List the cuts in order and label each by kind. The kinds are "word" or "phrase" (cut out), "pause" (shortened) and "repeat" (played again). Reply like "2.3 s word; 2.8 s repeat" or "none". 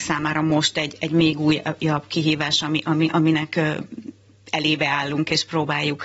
none